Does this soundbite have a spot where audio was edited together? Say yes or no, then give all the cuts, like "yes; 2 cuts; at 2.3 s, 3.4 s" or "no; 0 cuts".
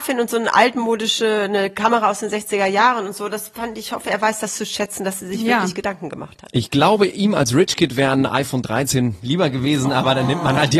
no; 0 cuts